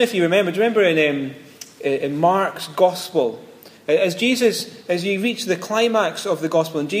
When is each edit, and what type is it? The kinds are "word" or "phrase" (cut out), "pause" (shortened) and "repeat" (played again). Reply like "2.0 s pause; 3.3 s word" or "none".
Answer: none